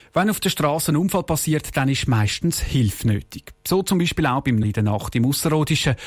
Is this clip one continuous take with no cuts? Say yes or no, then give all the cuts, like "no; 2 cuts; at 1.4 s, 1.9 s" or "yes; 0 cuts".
no; 1 cut; at 4.6 s